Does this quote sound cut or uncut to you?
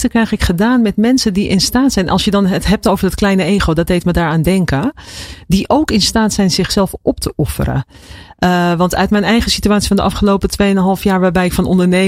uncut